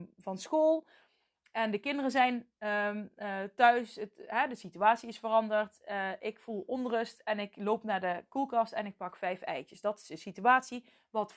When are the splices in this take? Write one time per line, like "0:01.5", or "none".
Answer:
none